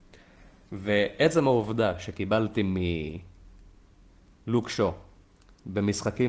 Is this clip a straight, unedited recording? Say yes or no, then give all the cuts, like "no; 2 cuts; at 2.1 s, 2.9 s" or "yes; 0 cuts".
yes; 0 cuts